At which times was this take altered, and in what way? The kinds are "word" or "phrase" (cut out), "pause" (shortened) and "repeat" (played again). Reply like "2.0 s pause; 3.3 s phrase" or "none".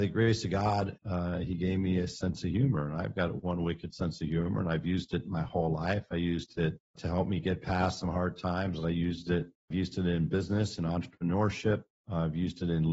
none